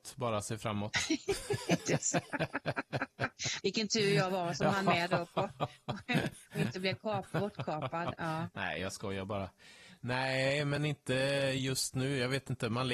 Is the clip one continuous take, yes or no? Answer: yes